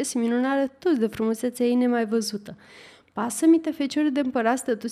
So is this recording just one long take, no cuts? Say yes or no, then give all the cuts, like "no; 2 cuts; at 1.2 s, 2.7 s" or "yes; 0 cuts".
yes; 0 cuts